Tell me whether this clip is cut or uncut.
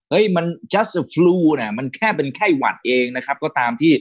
uncut